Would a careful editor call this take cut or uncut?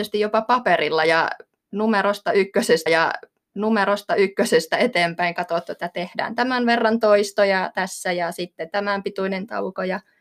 cut